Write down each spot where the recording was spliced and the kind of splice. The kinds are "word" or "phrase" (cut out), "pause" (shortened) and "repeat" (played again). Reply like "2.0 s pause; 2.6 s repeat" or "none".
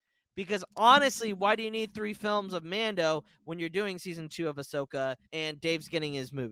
5.2 s pause